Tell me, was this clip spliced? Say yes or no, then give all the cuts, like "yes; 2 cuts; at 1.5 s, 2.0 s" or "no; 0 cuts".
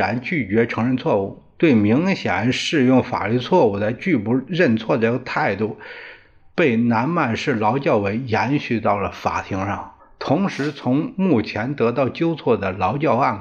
yes; 1 cut; at 10.0 s